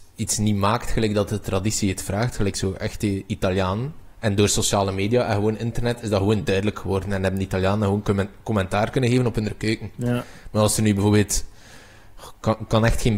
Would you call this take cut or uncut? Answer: uncut